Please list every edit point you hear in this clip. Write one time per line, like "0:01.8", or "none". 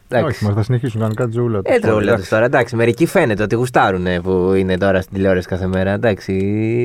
0:01.8